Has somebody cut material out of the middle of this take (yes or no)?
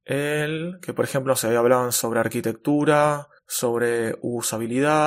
yes